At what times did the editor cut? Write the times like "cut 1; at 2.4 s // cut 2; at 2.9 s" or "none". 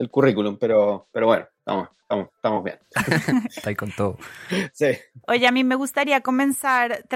none